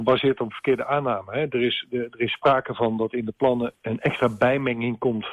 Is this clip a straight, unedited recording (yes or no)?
no